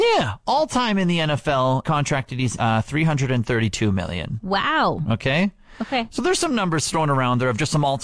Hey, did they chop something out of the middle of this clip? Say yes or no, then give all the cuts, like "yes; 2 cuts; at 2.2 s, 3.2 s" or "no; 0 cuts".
yes; 2 cuts; at 1.8 s, 2.6 s